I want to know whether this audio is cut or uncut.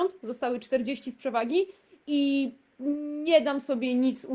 uncut